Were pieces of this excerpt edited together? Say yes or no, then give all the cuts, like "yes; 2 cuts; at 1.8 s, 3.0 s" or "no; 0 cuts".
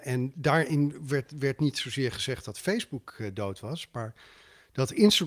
no; 0 cuts